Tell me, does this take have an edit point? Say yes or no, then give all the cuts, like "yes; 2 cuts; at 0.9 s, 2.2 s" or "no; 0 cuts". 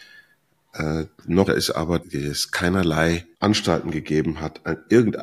yes; 3 cuts; at 1.5 s, 2.0 s, 3.3 s